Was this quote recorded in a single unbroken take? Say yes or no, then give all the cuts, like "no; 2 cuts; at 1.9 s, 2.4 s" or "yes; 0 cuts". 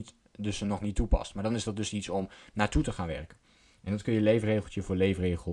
yes; 0 cuts